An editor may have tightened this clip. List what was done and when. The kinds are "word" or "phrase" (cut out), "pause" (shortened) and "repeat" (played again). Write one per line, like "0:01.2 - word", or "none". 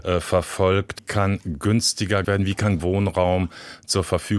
0:01.0 - word
0:02.2 - word
0:02.8 - word